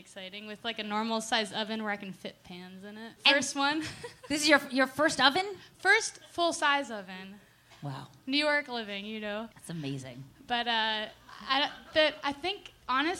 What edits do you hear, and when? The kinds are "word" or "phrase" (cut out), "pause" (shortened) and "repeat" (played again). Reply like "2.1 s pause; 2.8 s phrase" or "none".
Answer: 3.2 s pause; 9.5 s pause

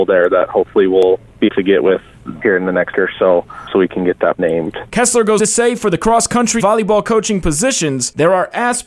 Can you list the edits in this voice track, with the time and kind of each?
1.5 s word; 2.9 s word; 4.4 s word; 5.4 s word; 6.6 s word

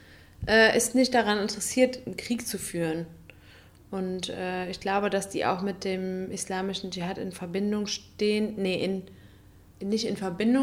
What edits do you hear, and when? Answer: none

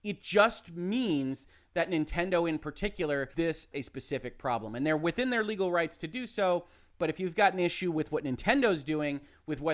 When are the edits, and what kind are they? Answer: 3.3 s word; 3.7 s word

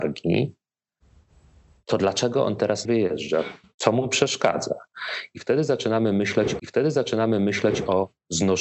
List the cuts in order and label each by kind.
2.8 s word; 3.6 s pause; 6.6 s repeat

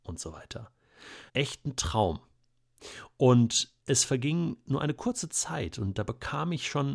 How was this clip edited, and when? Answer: 1.3 s pause; 3.8 s pause

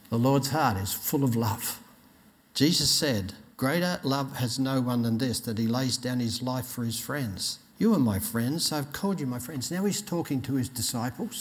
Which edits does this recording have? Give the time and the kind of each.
2.3 s pause; 3.5 s pause; 7.7 s pause

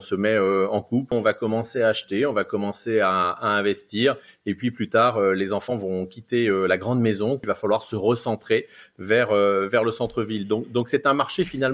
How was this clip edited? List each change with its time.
none

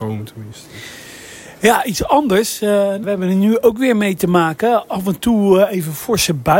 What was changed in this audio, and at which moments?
3.0 s word

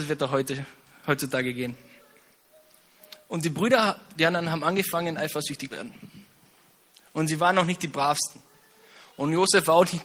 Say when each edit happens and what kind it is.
5.7 s word

